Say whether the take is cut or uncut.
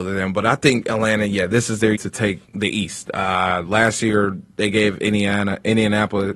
cut